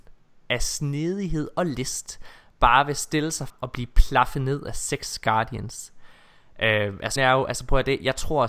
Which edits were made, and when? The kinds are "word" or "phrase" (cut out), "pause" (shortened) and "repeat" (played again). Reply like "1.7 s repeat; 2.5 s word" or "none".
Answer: 3.5 s word; 7.2 s word